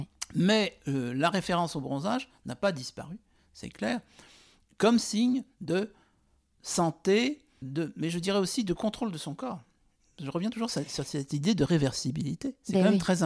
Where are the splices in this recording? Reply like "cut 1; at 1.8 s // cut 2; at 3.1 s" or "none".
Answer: cut 1; at 7.6 s